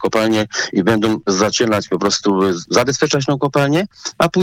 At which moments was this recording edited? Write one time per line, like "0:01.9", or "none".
none